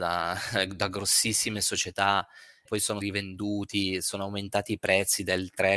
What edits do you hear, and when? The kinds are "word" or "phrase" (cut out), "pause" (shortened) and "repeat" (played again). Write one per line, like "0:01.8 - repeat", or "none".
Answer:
0:02.7 - word
0:03.0 - word